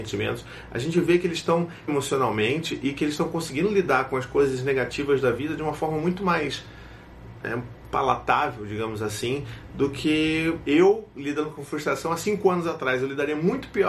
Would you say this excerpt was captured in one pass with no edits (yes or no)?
no